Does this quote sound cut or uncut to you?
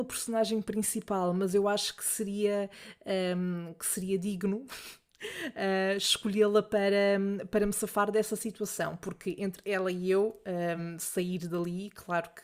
uncut